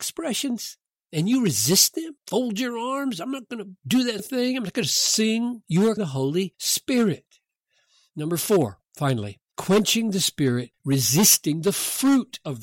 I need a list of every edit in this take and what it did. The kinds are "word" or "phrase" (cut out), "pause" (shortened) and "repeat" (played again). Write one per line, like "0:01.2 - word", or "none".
0:04.2 - word
0:06.0 - word
0:08.9 - pause
0:10.7 - word